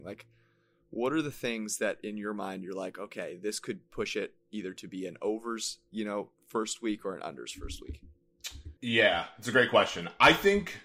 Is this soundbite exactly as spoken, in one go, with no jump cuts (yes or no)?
no